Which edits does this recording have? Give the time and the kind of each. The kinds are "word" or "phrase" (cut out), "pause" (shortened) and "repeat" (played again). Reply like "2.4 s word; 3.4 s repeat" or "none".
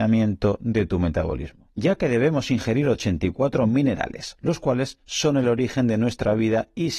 none